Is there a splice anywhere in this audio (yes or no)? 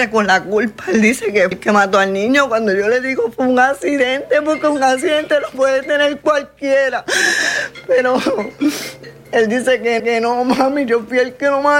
yes